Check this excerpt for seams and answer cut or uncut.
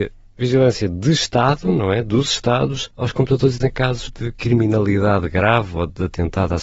cut